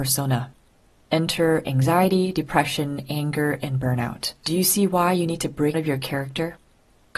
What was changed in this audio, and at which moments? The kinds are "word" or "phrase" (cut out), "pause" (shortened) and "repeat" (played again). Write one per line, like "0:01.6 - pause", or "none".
0:04.4 - pause
0:05.7 - word